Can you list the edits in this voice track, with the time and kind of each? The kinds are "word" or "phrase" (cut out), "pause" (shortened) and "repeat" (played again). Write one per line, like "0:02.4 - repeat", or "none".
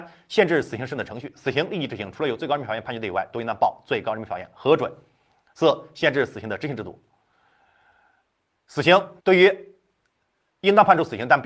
0:09.2 - pause

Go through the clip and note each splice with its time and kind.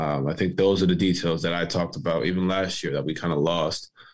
none

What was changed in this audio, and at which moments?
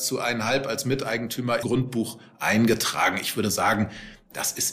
0:01.6 - word

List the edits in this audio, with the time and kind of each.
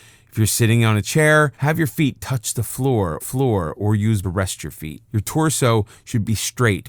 0:01.5 - pause
0:03.2 - repeat
0:04.2 - phrase
0:05.1 - pause

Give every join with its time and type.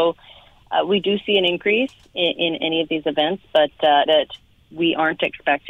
0:04.1 - word

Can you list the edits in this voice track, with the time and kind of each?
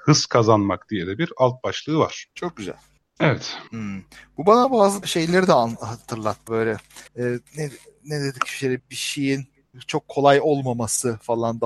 0:02.3 - pause
0:03.0 - pause
0:03.7 - pause
0:05.0 - word
0:06.5 - word
0:07.1 - pause
0:07.5 - pause
0:08.8 - word

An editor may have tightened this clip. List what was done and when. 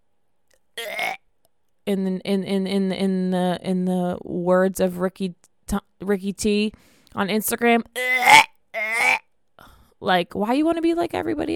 none

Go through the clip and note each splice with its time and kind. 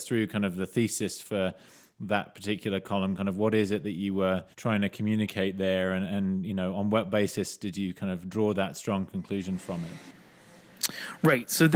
0:04.5 - pause

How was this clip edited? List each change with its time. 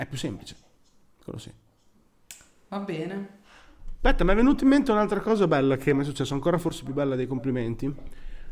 none

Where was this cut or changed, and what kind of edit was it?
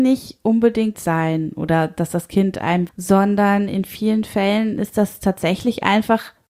0:00.9 - phrase
0:02.9 - phrase

